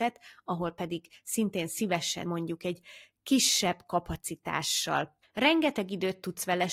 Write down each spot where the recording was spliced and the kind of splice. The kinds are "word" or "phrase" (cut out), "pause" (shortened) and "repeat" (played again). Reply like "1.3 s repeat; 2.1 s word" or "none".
2.3 s phrase